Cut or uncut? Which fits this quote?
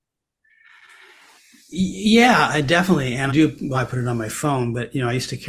cut